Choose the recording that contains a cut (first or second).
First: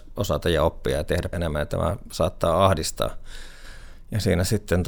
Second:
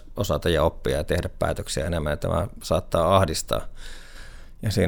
first